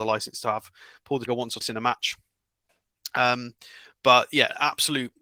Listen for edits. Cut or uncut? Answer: cut